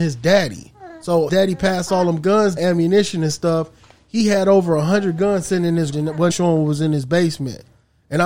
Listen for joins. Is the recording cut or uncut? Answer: cut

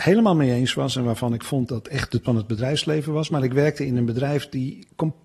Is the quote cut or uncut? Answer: cut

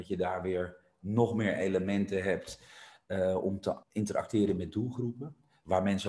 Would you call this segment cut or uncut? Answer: cut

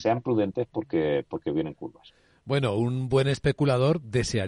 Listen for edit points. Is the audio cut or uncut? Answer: uncut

